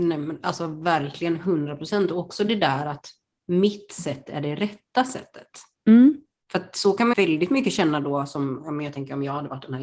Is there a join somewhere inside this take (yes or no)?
yes